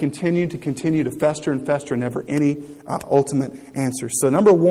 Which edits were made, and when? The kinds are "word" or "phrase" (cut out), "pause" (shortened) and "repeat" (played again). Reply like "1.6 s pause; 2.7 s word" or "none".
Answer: none